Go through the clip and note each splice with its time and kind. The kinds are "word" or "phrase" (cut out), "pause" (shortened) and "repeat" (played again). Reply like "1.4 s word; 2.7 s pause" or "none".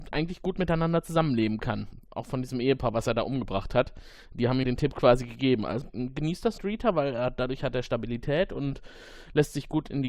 4.6 s word; 5.8 s word; 6.6 s word

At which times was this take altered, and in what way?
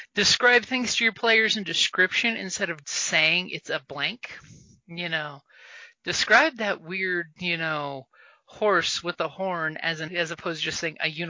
2.8 s word; 10.1 s word

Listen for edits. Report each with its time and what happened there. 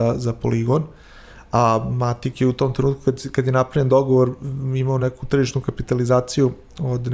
none

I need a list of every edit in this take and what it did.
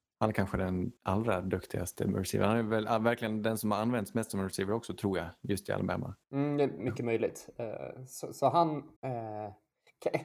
1.0 s pause; 6.2 s pause; 9.0 s pause

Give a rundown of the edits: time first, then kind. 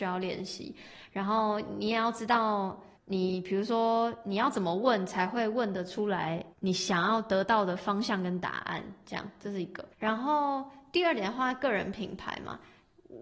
3.0 s pause; 6.5 s pause; 9.9 s pause

